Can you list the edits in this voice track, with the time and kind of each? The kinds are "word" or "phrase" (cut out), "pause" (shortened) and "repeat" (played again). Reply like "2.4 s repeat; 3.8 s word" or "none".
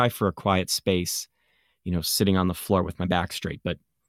none